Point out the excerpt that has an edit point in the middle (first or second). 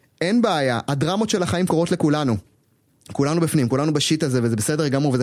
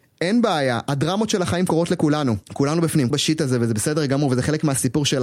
second